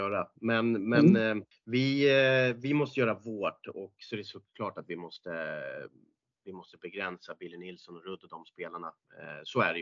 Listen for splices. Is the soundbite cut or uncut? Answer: cut